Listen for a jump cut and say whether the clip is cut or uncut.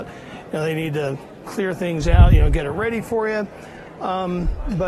uncut